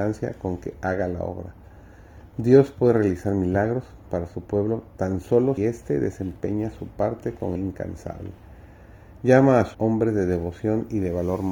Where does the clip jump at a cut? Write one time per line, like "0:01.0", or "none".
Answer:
0:05.6
0:07.6
0:09.7